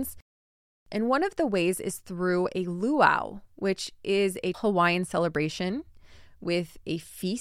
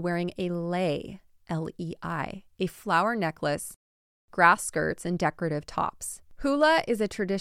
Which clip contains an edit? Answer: first; 1 cut; at 4.5 s

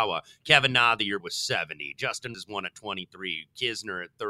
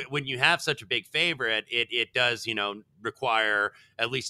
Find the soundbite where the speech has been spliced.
first; 2 cuts; at 1.2 s, 2.3 s

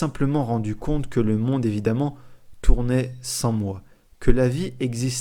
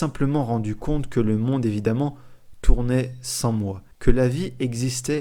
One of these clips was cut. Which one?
second; 1 cut; at 3.9 s

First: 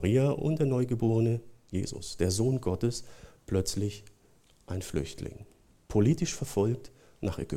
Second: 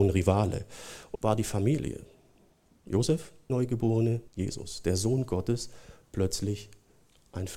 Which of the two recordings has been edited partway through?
second; 3 cuts; at 1.2 s, 3.5 s, 4.3 s

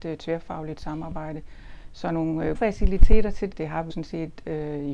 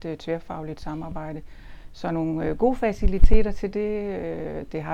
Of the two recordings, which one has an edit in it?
first; 3 cuts; at 2.5 s, 3.5 s, 3.9 s

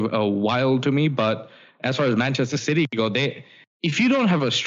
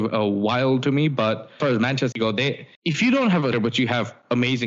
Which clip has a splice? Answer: second; 4 cuts; at 1.6 s, 2.1 s, 2.7 s, 3.5 s

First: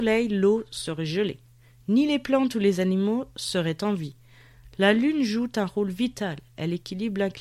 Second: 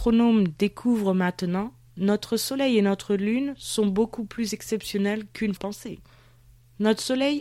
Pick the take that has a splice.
second; 1 cut; at 5.6 s

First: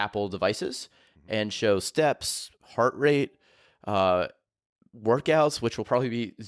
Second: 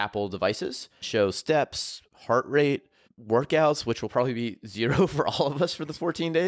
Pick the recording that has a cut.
second; 2 cuts; at 1.0 s, 3.0 s

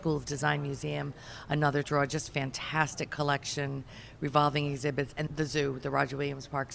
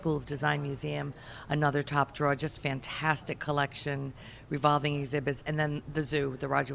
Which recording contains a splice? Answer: first; 2 cuts; at 1.8 s, 5.3 s

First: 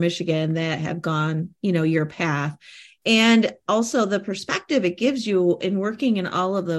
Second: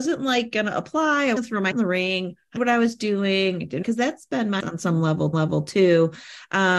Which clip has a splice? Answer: second; 6 cuts; at 1.4 s, 1.7 s, 2.6 s, 3.8 s, 4.6 s, 5.3 s

